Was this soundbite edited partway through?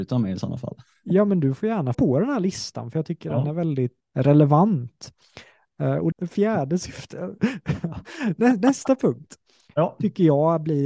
yes; 3 cuts; at 1.9 s, 4.0 s, 6.1 s

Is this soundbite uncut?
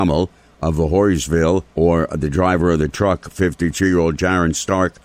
no; 1 cut; at 1.7 s

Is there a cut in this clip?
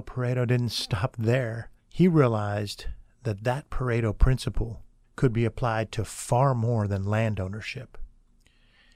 yes; 2 cuts; at 1.8 s, 5.0 s

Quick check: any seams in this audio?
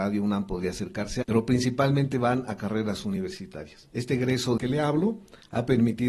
yes; 3 cuts; at 1.2 s, 3.9 s, 4.6 s

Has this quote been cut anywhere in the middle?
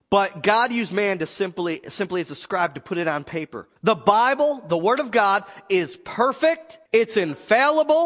yes; 2 cuts; at 3.8 s, 6.9 s

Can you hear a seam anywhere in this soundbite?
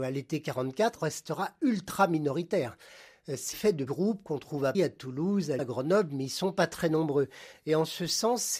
yes; 5 cuts; at 1.0 s, 3.5 s, 3.9 s, 4.7 s, 5.6 s

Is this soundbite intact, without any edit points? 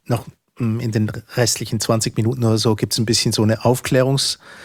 yes; 0 cuts

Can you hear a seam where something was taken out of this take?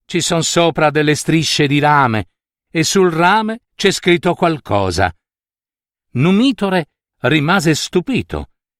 yes; 3 cuts; at 2.4 s, 3.6 s, 7.1 s

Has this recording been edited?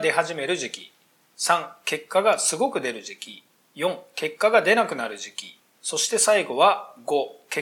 no; 0 cuts

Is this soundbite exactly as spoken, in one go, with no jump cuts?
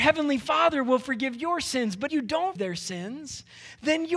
no; 2 cuts; at 2.1 s, 2.6 s

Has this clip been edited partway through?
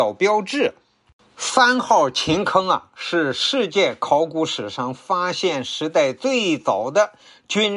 no; 0 cuts

